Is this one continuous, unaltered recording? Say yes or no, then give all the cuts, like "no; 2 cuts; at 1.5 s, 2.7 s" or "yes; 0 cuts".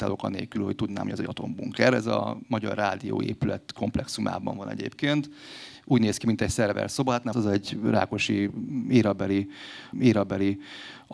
no; 2 cuts; at 7.3 s, 9.9 s